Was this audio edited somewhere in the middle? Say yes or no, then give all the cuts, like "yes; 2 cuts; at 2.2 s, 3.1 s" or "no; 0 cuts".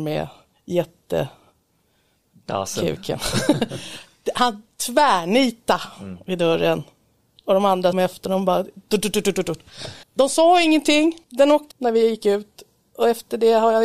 yes; 4 cuts; at 7.9 s, 10.0 s, 11.2 s, 11.7 s